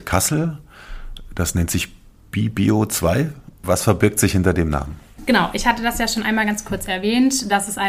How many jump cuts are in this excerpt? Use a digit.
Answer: 0